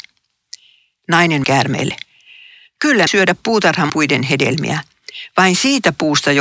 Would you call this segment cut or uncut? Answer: cut